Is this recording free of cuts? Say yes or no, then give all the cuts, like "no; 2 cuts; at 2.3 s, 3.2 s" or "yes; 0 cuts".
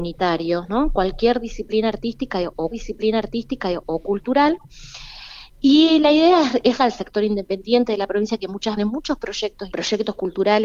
no; 4 cuts; at 2.7 s, 6.8 s, 8.8 s, 9.7 s